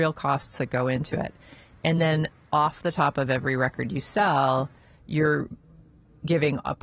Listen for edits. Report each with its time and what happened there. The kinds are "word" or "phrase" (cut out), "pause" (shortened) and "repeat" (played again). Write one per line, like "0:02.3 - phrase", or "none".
none